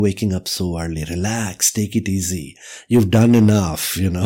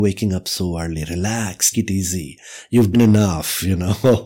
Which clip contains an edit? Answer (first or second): second